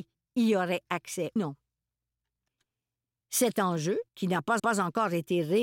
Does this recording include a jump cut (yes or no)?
yes